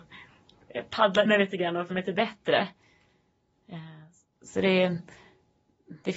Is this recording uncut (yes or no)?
no